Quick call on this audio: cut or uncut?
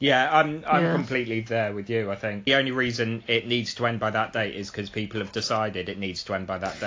cut